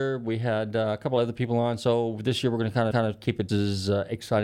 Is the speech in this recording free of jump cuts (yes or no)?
no